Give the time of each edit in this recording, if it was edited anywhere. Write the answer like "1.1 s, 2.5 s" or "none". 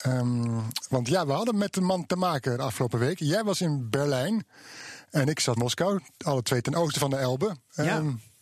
5.6 s